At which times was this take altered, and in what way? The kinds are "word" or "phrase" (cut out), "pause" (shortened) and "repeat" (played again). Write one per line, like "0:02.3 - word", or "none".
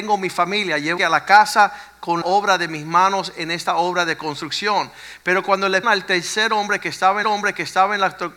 0:01.0 - phrase
0:02.2 - word
0:05.8 - word
0:07.2 - repeat